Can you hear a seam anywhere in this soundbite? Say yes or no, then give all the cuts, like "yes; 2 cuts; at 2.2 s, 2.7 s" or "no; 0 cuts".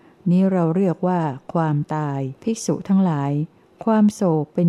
yes; 1 cut; at 2.4 s